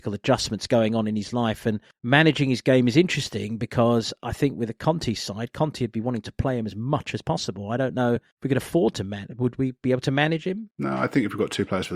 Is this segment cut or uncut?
uncut